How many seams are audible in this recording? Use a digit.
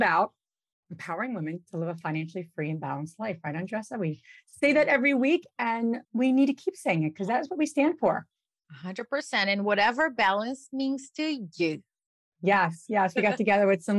1